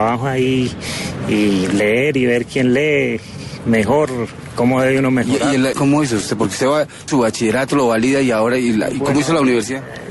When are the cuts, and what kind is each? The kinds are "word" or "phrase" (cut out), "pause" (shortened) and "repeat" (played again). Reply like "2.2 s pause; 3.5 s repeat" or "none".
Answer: 5.7 s phrase; 7.1 s word